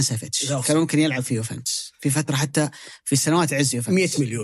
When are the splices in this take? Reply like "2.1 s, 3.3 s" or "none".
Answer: none